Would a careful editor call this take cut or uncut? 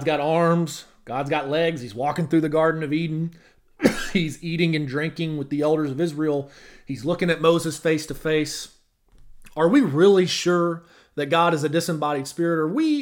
uncut